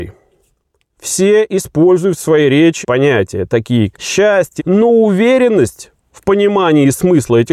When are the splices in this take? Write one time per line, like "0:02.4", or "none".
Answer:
0:02.8
0:03.9
0:04.6

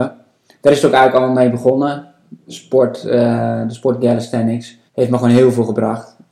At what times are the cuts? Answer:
0:04.9

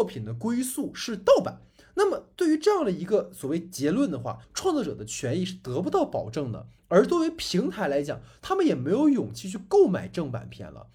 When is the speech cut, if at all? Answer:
0:04.4

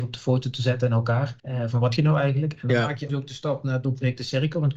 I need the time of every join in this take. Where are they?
0:01.4
0:02.0
0:03.1

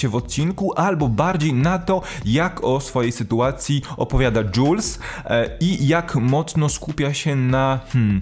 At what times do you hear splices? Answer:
none

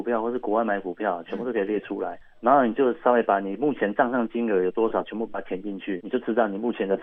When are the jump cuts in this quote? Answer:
0:02.2
0:06.0

